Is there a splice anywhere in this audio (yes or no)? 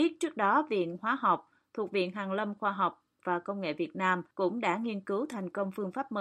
yes